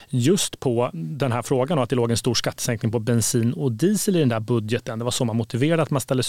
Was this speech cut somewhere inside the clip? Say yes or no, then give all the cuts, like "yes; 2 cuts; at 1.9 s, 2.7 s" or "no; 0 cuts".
no; 0 cuts